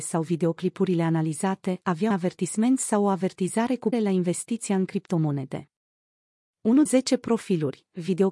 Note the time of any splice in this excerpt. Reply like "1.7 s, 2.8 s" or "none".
2.1 s, 3.9 s, 6.9 s